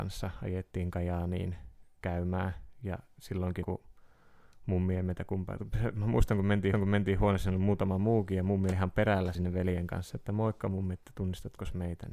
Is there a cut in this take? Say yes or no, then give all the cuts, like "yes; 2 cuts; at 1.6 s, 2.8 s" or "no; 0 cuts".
yes; 5 cuts; at 2.0 s, 3.6 s, 6.7 s, 8.7 s, 9.3 s